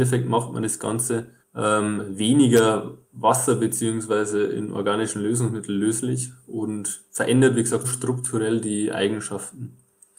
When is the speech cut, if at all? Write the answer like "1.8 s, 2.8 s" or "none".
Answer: 1.4 s, 3.0 s, 7.8 s